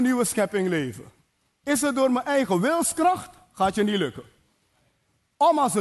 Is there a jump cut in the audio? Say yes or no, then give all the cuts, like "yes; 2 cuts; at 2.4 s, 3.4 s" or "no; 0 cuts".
no; 0 cuts